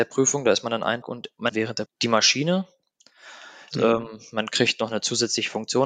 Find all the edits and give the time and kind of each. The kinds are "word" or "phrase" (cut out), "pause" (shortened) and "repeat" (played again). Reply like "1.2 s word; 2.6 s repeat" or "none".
1.0 s word; 1.5 s word; 1.9 s word; 3.7 s phrase